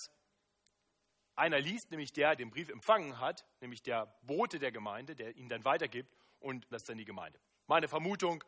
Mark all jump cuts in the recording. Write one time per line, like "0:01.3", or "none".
0:02.4
0:06.7